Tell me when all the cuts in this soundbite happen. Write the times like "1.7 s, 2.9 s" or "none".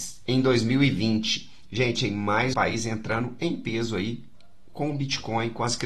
2.5 s